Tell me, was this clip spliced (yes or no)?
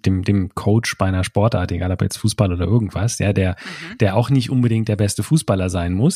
no